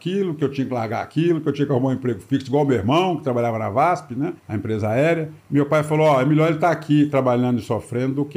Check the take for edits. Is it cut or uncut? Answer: cut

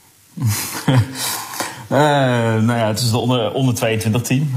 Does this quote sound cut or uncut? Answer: uncut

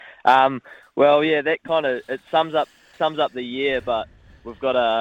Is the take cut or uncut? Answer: uncut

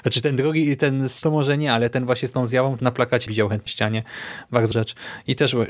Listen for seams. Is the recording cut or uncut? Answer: cut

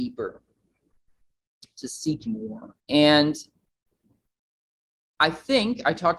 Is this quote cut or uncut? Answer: cut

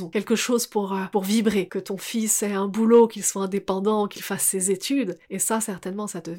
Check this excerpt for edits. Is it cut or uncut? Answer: cut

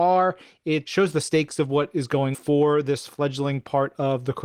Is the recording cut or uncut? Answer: cut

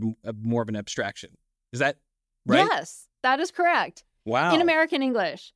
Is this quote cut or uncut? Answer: uncut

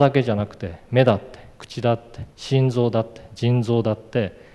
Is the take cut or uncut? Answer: cut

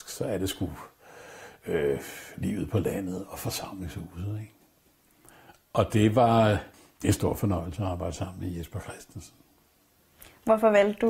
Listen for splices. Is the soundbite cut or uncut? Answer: cut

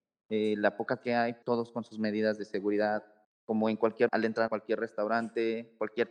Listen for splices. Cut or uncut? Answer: cut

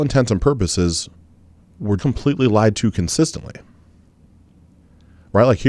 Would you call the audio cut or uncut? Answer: cut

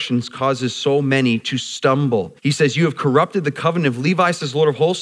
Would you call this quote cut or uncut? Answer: cut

